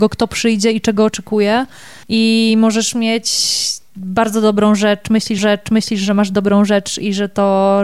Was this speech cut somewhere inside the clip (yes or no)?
yes